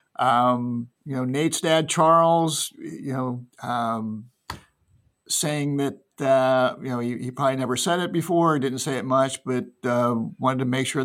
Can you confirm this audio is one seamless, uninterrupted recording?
no; 2 cuts; at 1.0 s, 3.5 s

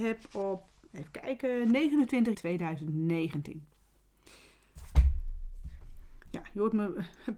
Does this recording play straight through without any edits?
no; 1 cut; at 2.3 s

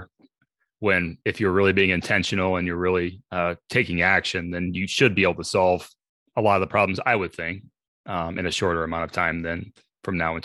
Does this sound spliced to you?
no; 0 cuts

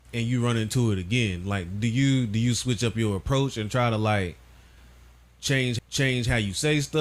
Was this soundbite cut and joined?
yes; 1 cut; at 5.8 s

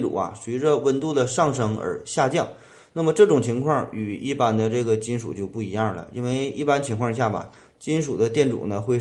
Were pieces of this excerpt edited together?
no; 0 cuts

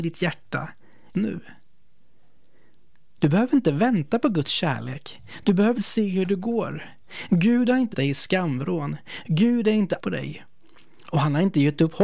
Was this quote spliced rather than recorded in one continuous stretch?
yes; 4 cuts; at 1.1 s, 5.7 s, 7.9 s, 10.0 s

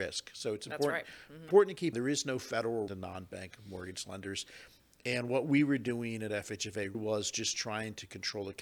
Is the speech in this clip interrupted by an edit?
yes; 3 cuts; at 1.9 s, 2.9 s, 6.9 s

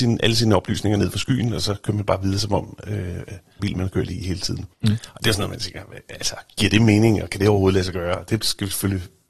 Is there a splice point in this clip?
yes; 2 cuts; at 3.6 s, 4.7 s

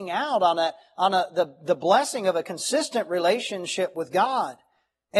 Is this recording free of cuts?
yes; 0 cuts

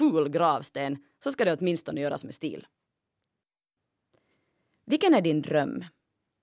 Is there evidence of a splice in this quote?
no; 0 cuts

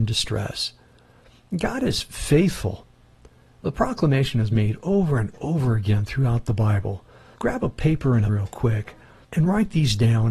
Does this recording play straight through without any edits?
no; 1 cut; at 8.3 s

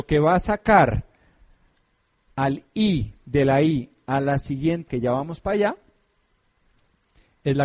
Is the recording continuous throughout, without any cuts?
no; 1 cut; at 4.9 s

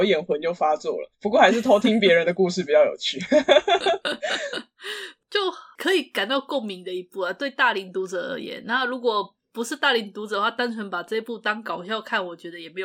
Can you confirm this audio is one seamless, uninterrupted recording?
no; 1 cut; at 1.1 s

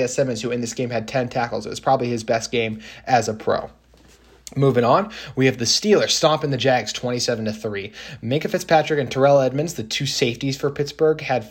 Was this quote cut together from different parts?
no; 0 cuts

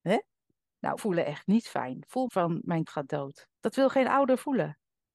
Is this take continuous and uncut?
no; 4 cuts; at 1.0 s, 2.2 s, 2.9 s, 3.6 s

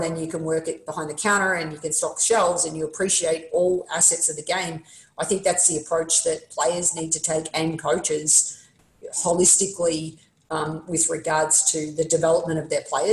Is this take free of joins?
yes; 0 cuts

